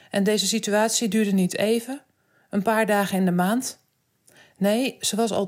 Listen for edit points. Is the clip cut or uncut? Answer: uncut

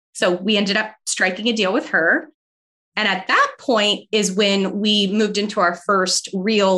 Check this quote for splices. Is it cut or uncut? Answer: uncut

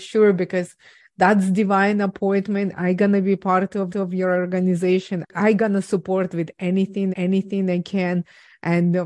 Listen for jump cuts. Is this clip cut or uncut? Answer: cut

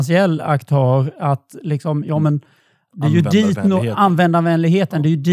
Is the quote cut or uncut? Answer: uncut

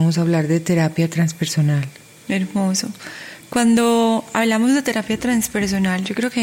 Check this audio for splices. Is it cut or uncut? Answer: uncut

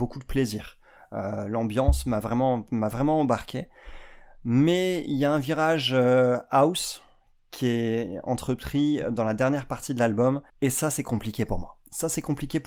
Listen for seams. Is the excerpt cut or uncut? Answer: cut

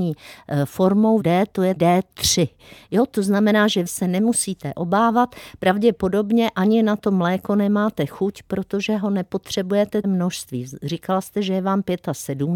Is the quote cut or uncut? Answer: cut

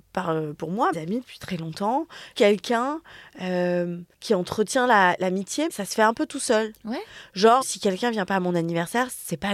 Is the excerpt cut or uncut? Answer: cut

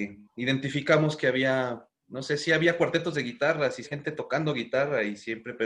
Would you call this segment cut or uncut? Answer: cut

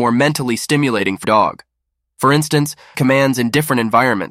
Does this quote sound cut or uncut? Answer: cut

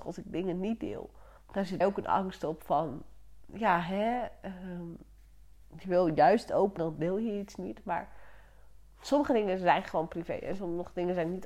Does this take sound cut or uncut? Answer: cut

